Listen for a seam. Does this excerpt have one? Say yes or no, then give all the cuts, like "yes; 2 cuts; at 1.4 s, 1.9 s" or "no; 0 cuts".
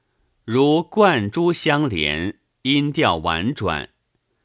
no; 0 cuts